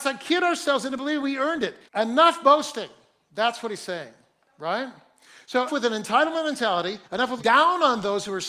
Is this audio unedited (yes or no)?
no